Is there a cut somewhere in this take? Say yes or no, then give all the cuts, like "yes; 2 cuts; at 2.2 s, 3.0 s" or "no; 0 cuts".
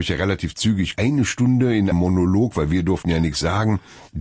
yes; 2 cuts; at 0.9 s, 1.9 s